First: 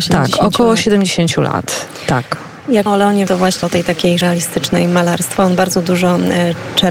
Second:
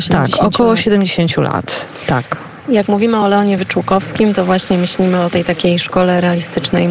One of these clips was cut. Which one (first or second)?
first